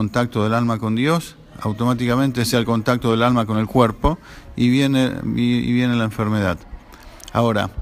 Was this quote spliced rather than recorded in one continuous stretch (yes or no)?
yes